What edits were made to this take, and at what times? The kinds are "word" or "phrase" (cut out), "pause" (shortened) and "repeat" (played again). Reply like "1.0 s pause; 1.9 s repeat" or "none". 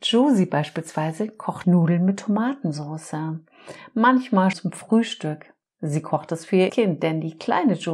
1.6 s word; 4.5 s word; 6.7 s word